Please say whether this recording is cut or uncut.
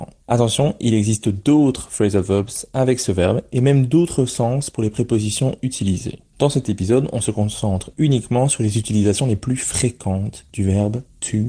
uncut